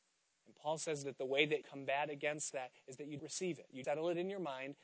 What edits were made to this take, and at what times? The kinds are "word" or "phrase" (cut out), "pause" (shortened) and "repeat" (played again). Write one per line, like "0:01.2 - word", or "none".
0:01.6 - word
0:03.2 - word
0:03.8 - word

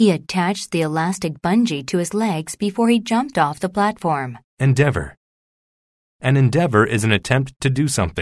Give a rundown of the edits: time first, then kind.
0:04.5 - pause

